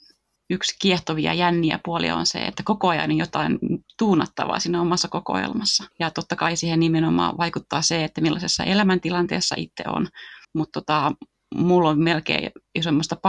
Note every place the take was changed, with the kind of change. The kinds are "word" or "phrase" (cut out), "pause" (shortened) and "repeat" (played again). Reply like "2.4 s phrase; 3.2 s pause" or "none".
5.9 s pause; 10.4 s pause